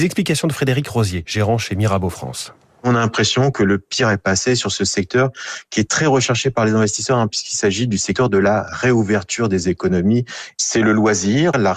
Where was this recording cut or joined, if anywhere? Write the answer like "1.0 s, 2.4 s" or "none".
none